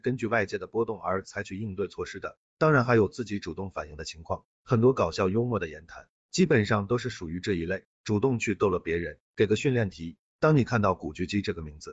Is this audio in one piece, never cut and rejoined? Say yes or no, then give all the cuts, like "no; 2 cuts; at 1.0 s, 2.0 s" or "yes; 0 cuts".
no; 1 cut; at 9.3 s